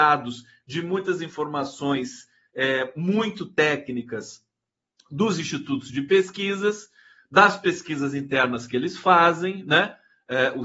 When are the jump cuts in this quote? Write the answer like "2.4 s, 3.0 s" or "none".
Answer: none